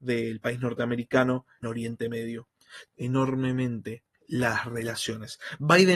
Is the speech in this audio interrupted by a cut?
yes; 3 cuts; at 1.6 s, 2.9 s, 4.1 s

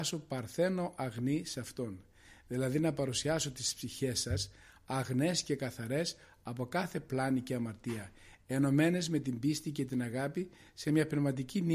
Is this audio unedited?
yes; 0 cuts

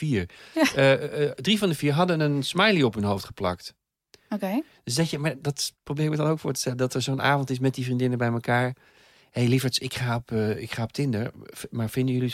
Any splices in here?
no; 0 cuts

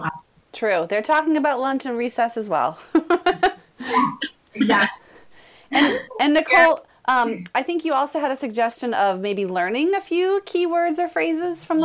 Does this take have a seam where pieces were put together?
no; 0 cuts

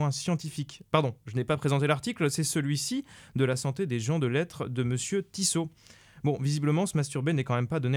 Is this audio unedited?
yes; 0 cuts

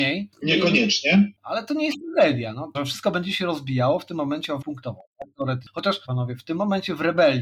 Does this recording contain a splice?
yes; 3 cuts; at 2.7 s, 4.6 s, 6.0 s

